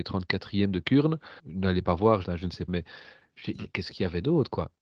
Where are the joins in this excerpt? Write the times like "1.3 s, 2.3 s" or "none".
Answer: 1.4 s, 2.2 s, 2.7 s